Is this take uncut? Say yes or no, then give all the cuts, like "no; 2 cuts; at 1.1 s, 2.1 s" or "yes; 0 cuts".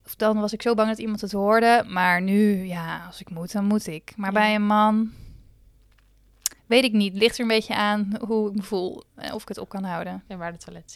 no; 1 cut; at 6.6 s